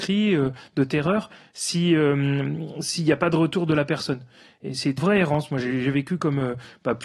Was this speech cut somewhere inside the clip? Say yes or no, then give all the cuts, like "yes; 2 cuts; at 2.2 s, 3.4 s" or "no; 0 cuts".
yes; 1 cut; at 5.0 s